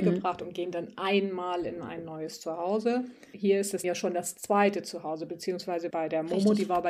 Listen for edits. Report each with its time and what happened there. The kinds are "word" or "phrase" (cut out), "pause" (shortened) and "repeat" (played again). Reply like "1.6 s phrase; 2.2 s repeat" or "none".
3.8 s word; 5.9 s word